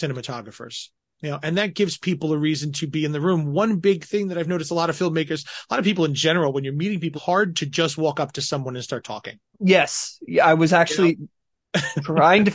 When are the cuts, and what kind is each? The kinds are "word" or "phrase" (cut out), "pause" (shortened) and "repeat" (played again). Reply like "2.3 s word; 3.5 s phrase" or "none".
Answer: 1.0 s pause; 7.1 s word; 9.5 s pause